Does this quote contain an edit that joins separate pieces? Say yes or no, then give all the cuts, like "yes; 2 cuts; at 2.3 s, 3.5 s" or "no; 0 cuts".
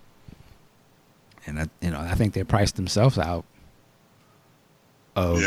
no; 0 cuts